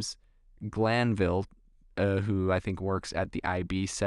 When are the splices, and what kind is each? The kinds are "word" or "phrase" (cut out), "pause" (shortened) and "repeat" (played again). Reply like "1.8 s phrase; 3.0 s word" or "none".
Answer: none